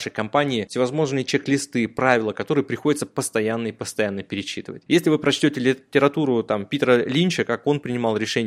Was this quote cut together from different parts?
no; 0 cuts

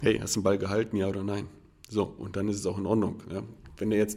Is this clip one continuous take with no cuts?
yes; 0 cuts

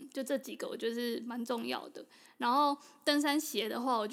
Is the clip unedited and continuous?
yes; 0 cuts

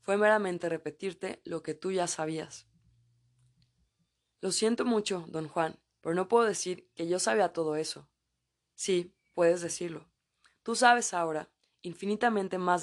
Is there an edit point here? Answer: no; 0 cuts

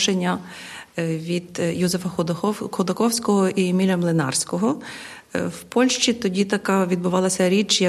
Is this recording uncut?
yes; 0 cuts

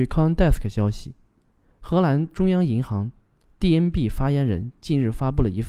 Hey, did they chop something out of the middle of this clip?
no; 0 cuts

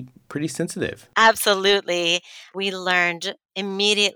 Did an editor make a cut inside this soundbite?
yes; 1 cut; at 1.1 s

